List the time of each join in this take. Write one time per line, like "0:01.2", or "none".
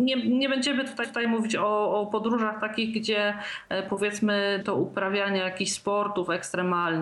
0:01.0
0:04.6